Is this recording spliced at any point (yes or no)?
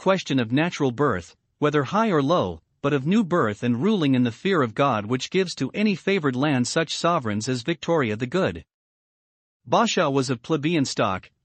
no